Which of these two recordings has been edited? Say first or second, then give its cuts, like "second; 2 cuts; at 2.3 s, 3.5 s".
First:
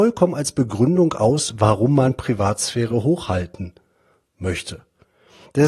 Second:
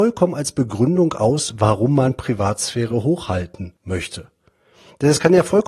second; 1 cut; at 3.8 s